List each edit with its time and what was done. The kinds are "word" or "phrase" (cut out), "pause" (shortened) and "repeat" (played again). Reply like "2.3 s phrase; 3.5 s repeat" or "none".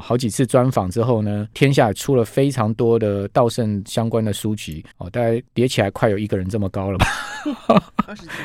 1.5 s word; 4.9 s pause; 5.5 s pause